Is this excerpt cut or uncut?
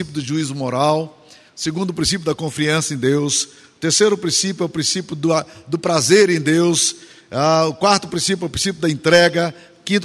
uncut